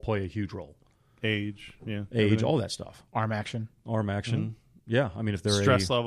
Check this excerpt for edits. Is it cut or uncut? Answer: cut